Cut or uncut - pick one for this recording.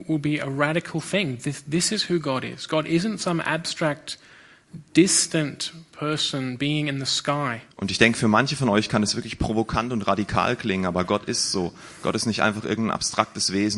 cut